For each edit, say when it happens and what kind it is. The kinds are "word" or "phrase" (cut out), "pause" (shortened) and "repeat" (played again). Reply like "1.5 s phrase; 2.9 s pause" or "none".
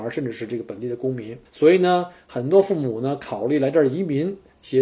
1.4 s pause